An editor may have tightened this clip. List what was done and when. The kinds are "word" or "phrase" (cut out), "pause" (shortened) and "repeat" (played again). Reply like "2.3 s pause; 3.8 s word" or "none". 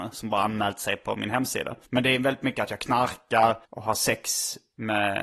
1.8 s pause; 3.6 s pause